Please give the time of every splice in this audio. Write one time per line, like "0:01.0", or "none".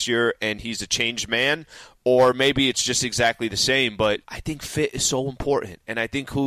0:04.2